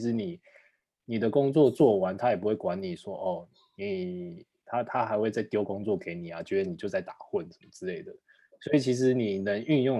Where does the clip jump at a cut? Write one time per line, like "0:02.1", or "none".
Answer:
none